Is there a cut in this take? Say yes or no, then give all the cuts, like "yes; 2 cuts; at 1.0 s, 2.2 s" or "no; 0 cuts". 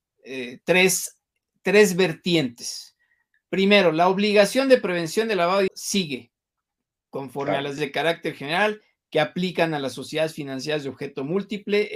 yes; 2 cuts; at 5.7 s, 7.8 s